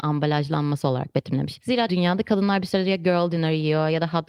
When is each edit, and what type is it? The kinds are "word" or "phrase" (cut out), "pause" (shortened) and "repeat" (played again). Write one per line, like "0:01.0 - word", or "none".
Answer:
0:01.9 - word